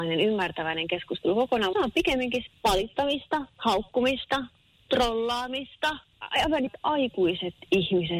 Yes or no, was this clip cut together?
yes